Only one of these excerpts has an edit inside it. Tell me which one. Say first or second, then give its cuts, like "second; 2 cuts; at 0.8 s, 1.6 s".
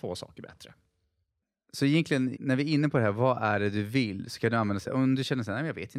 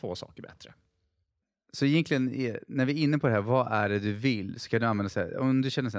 first; 2 cuts; at 2.3 s, 4.9 s